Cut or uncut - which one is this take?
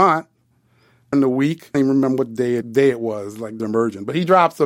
cut